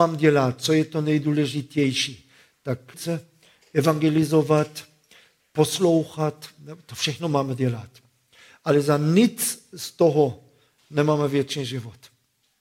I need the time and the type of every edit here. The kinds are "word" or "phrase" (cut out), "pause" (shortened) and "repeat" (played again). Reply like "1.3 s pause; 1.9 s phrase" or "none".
2.9 s word